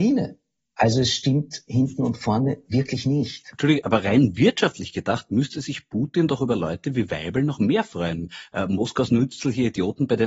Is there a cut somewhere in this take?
no; 0 cuts

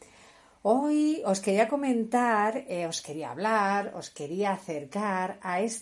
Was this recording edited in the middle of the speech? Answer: no; 0 cuts

